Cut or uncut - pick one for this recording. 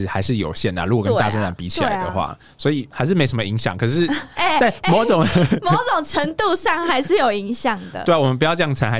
uncut